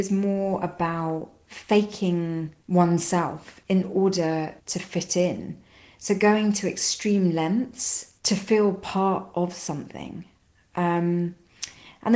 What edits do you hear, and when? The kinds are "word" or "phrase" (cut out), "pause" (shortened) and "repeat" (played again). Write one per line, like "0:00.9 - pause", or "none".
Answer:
0:02.6 - pause
0:04.6 - pause
0:08.2 - pause

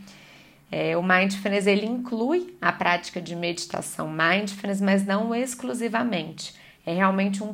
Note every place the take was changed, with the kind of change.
none

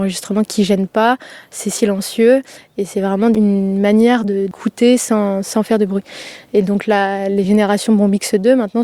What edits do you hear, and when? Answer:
none

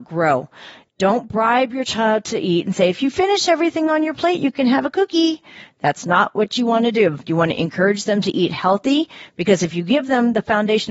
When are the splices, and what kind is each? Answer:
none

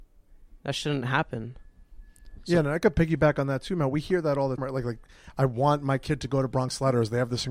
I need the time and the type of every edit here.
0:04.6 - word

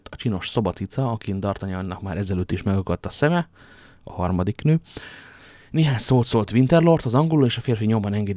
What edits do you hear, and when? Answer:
none

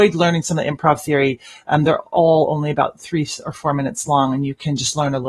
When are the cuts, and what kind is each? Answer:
none

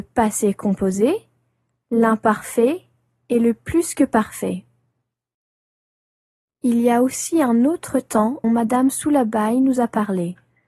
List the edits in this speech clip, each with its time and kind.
0:08.4 - word

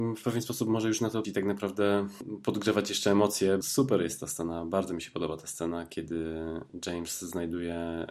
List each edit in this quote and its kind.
0:01.2 - phrase
0:03.6 - word

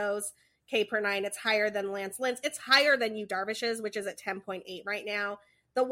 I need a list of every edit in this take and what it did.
none

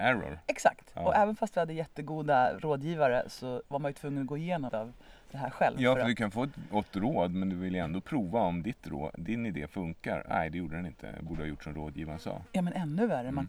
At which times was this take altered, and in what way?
0:03.7 - pause
0:04.7 - word
0:09.1 - word

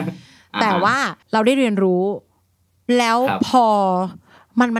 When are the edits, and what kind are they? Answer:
0:01.2 - pause

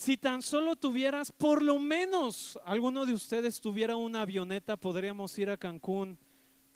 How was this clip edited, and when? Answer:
none

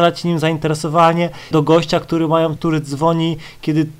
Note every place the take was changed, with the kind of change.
0:01.5 - word
0:02.6 - phrase

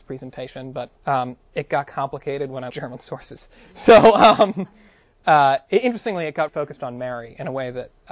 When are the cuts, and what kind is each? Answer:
0:01.0 - pause
0:02.7 - phrase
0:06.5 - word

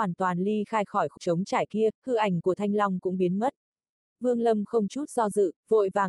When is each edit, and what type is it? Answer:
0:01.2 - word

